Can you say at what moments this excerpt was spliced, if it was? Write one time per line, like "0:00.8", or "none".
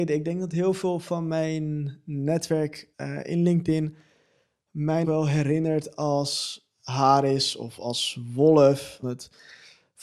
0:02.9
0:05.0
0:09.0